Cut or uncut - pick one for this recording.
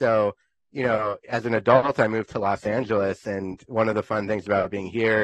uncut